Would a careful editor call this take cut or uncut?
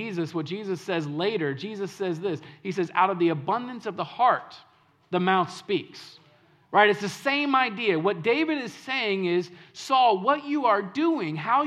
uncut